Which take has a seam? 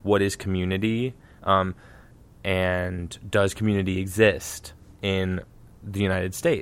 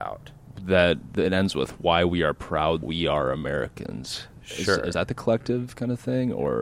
second; 2 cuts; at 2.8 s, 4.9 s

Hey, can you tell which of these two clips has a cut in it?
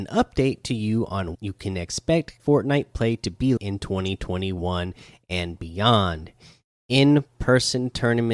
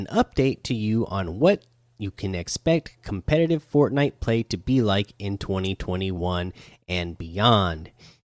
first; 3 cuts; at 1.3 s, 2.4 s, 3.6 s

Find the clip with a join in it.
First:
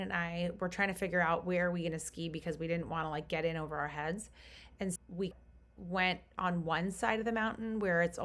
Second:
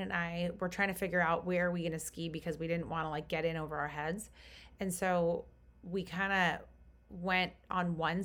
first; 2 cuts; at 5.0 s, 5.3 s

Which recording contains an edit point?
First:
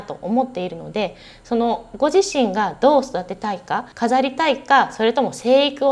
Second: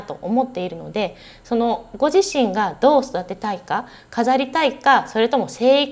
first; 1 cut; at 3.9 s

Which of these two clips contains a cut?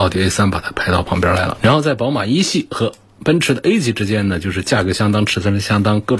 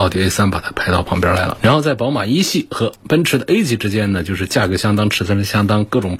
second; 1 cut; at 3.0 s

